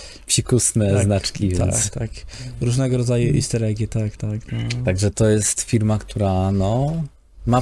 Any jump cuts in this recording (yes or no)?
no